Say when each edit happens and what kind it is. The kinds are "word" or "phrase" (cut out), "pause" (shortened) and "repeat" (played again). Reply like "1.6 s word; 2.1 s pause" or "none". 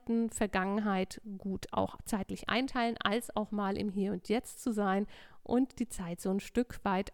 none